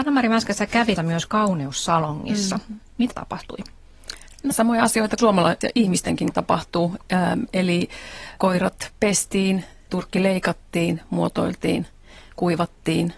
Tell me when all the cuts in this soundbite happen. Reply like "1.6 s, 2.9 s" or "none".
1.0 s, 1.3 s, 3.1 s, 4.5 s, 5.2 s, 5.6 s, 6.3 s, 8.4 s, 9.9 s